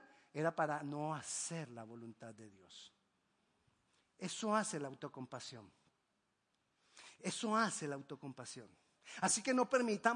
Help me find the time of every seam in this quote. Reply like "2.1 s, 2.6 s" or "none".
none

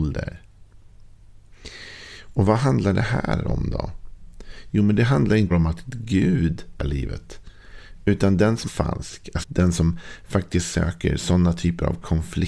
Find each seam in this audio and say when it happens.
5.5 s, 6.8 s, 8.7 s, 9.4 s

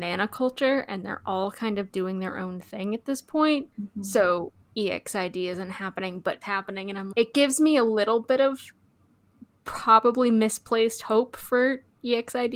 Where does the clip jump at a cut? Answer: 3.7 s, 4.6 s, 6.4 s, 7.1 s

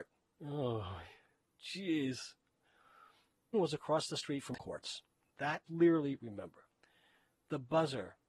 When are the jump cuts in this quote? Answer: 3.5 s, 4.6 s, 5.7 s

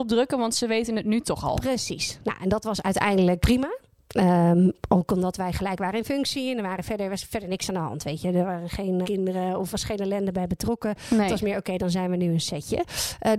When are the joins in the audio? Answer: 3.4 s, 9.0 s, 9.7 s

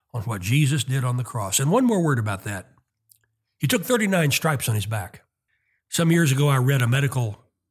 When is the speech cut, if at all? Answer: 2.9 s, 5.5 s

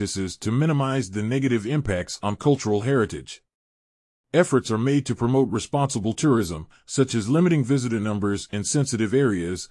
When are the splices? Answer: none

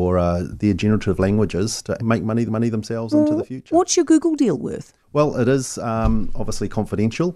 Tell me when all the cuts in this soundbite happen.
2.0 s, 2.5 s, 5.0 s

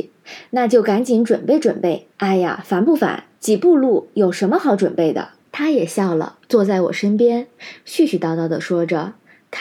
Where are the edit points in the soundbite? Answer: 2.1 s, 3.3 s, 5.4 s, 6.4 s

